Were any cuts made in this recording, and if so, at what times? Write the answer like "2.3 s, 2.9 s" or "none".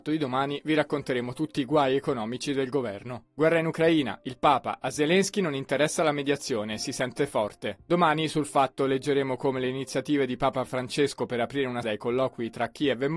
11.8 s